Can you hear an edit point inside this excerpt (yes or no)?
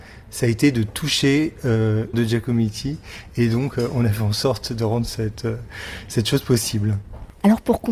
yes